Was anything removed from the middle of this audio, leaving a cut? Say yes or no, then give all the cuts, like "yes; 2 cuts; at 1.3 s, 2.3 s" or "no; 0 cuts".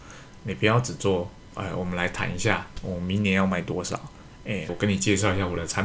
yes; 1 cut; at 4.7 s